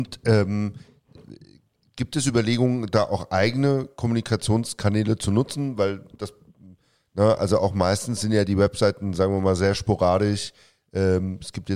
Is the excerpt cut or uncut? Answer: uncut